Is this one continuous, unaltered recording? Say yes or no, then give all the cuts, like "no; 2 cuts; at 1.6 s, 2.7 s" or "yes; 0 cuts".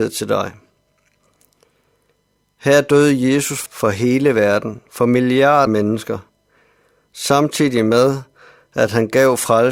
no; 2 cuts; at 3.7 s, 5.7 s